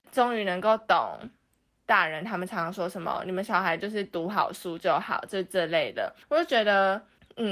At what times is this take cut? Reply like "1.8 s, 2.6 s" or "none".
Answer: 6.2 s